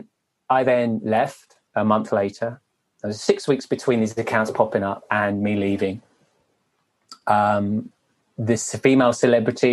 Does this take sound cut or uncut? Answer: cut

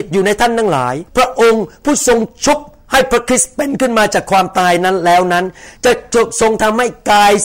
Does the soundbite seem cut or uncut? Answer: cut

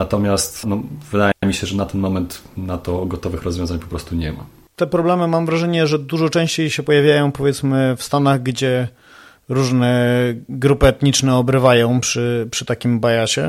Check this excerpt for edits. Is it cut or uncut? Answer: uncut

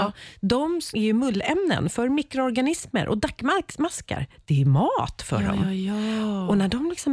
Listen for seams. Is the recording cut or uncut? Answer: cut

